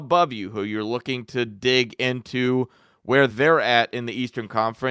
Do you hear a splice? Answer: no; 0 cuts

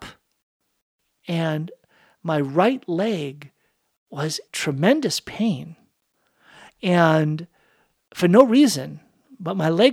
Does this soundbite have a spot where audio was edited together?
yes; 1 cut; at 4.5 s

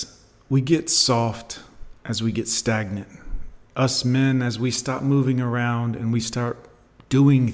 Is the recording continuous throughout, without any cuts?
yes; 0 cuts

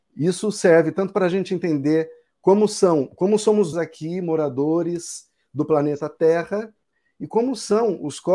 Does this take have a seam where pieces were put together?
yes; 1 cut; at 3.7 s

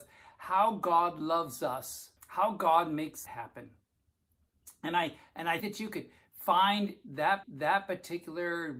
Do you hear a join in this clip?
yes; 4 cuts; at 2.2 s, 3.3 s, 5.6 s, 7.4 s

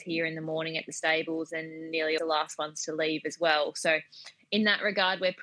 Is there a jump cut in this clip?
yes; 1 cut; at 2.2 s

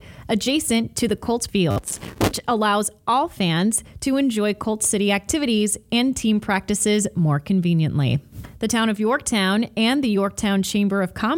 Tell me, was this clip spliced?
yes; 1 cut; at 1.5 s

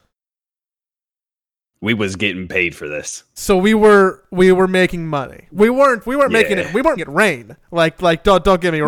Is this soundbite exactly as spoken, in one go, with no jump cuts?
no; 1 cut; at 7.0 s

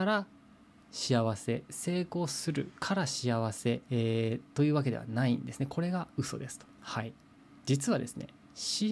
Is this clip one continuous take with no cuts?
no; 3 cuts; at 3.8 s, 6.7 s, 7.4 s

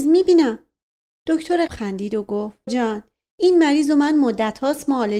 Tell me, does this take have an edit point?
yes; 2 cuts; at 1.7 s, 2.7 s

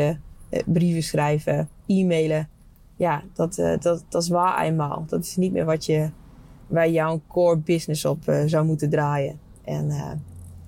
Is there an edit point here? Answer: no; 0 cuts

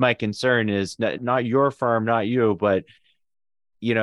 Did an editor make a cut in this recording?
yes; 1 cut; at 1.2 s

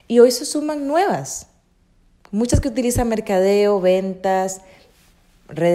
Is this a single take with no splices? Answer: yes; 0 cuts

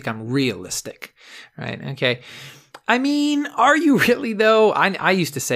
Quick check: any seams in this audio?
no; 0 cuts

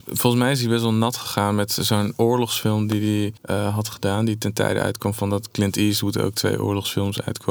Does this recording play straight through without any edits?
no; 1 cut; at 3.4 s

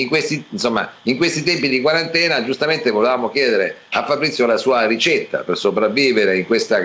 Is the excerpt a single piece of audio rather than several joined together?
yes; 0 cuts

